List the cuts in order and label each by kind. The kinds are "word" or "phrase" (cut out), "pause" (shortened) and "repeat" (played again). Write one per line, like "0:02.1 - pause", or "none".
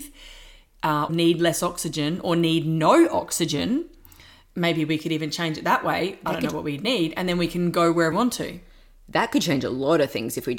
0:01.1 - word
0:08.1 - word